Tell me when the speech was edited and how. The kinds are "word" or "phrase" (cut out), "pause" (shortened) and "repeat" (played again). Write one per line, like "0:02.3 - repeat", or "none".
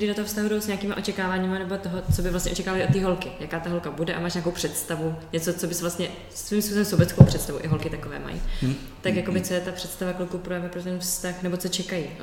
none